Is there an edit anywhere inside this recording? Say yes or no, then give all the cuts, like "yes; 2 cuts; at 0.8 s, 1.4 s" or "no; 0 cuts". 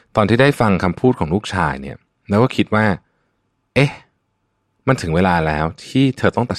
no; 0 cuts